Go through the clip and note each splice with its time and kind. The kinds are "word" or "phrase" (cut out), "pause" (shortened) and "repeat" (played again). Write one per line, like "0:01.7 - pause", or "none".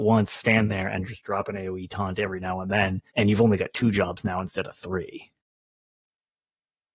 0:03.1 - pause

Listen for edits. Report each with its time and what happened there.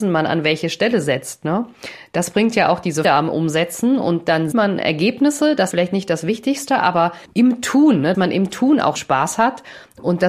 0:03.0 - word
0:04.5 - word
0:05.7 - word
0:07.3 - pause
0:08.1 - word
0:09.0 - word

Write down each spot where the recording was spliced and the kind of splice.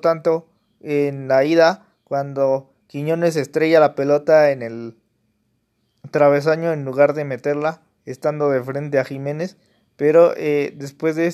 none

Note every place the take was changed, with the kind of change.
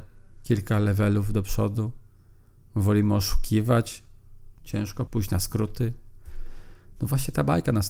0:04.6 - word
0:05.1 - word

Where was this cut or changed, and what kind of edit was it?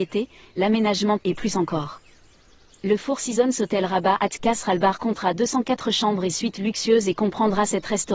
0:01.2 - word

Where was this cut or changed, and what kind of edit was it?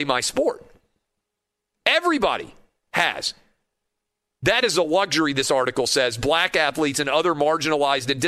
none

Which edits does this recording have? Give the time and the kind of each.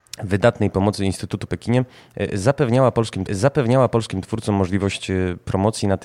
0:01.5 - phrase
0:03.3 - repeat

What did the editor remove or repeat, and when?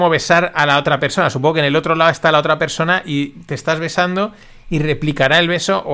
none

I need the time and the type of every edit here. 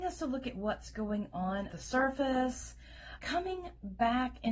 0:01.7 - word
0:03.2 - word

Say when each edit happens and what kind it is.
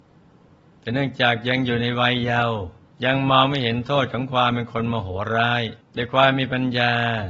0:02.9 - pause
0:05.8 - pause

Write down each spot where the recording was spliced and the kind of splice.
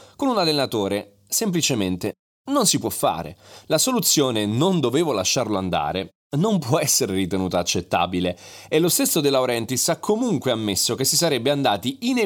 none

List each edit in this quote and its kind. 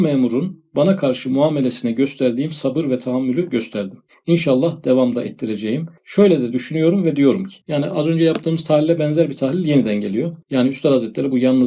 0:06.0 - pause
0:07.6 - pause
0:10.4 - pause

